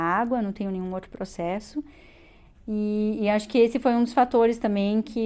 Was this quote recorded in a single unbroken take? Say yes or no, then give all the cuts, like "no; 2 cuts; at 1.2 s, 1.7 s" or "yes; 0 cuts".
yes; 0 cuts